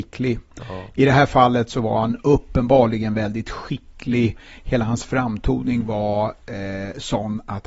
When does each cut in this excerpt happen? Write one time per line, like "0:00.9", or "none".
none